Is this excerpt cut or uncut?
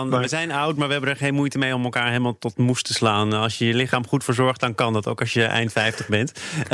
uncut